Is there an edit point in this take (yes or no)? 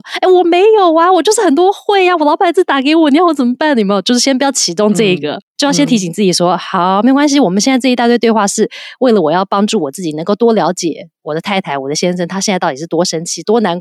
no